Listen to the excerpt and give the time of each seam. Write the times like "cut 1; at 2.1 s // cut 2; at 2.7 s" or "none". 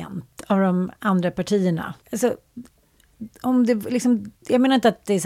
cut 1; at 2.0 s // cut 2; at 4.4 s